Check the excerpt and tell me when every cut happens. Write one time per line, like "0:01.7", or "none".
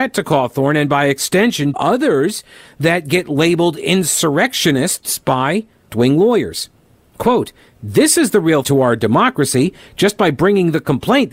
0:01.7
0:05.9
0:08.6